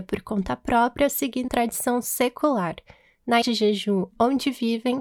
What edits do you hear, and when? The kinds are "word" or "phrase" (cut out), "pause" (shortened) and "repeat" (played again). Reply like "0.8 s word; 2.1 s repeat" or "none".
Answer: 1.5 s word; 3.4 s word